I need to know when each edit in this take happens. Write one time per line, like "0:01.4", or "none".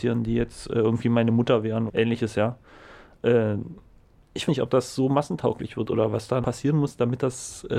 0:01.9
0:04.5
0:06.4